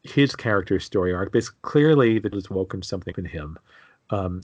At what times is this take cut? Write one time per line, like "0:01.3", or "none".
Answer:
0:02.3
0:03.1